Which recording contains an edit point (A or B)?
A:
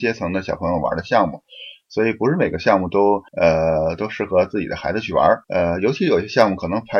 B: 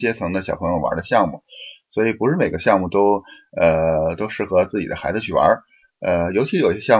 A